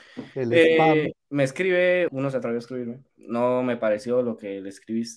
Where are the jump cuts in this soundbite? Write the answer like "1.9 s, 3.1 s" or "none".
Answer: 1.2 s, 2.1 s, 3.1 s